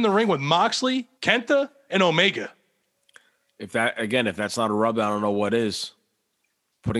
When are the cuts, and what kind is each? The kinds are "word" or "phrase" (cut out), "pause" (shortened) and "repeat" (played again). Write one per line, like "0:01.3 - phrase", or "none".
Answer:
0:01.2 - pause
0:03.0 - pause